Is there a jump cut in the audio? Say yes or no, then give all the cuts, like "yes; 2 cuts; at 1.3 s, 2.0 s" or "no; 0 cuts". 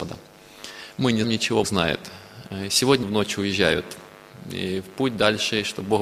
yes; 3 cuts; at 1.2 s, 1.6 s, 3.0 s